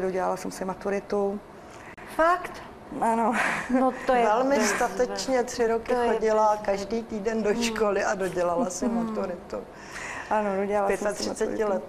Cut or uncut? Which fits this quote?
uncut